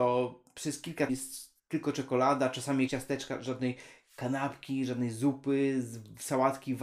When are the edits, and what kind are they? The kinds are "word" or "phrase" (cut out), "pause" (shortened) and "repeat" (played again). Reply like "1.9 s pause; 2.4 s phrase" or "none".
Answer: 1.1 s word; 2.9 s word